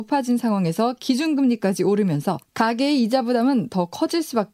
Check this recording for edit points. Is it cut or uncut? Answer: uncut